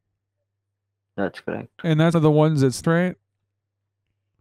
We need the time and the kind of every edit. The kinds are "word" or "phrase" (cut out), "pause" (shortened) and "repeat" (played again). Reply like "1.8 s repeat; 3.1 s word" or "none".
2.1 s word; 2.8 s phrase